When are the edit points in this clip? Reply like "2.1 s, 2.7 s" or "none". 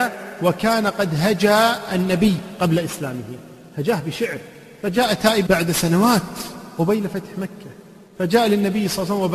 5.5 s